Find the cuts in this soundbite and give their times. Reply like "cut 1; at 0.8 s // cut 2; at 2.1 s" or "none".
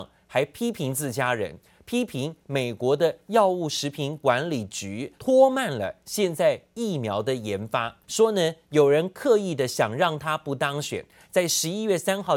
cut 1; at 5.2 s // cut 2; at 8.0 s